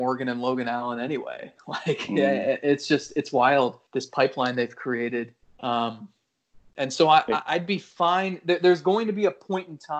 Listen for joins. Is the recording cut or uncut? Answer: cut